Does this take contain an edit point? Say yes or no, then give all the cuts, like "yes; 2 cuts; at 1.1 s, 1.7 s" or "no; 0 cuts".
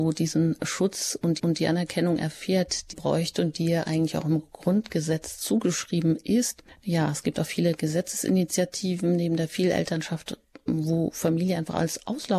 yes; 2 cuts; at 1.4 s, 2.9 s